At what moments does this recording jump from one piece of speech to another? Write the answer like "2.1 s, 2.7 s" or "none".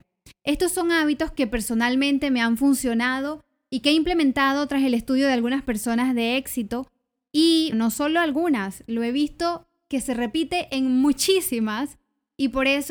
7.7 s